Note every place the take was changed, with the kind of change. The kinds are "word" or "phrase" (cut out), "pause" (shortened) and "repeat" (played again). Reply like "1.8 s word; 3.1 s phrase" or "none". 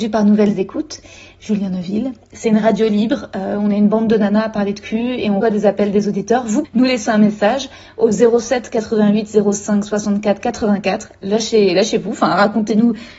5.4 s word; 6.6 s word